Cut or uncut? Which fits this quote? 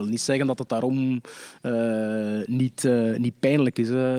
uncut